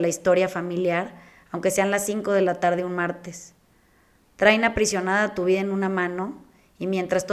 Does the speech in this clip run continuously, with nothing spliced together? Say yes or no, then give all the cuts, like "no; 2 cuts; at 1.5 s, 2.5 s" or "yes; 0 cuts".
yes; 0 cuts